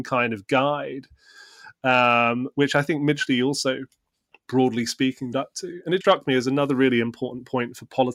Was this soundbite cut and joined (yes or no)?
yes